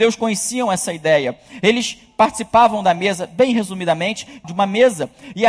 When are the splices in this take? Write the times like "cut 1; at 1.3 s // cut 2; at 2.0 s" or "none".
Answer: cut 1; at 4.4 s